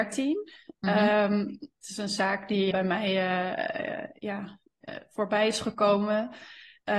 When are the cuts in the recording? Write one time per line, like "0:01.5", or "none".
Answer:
0:02.7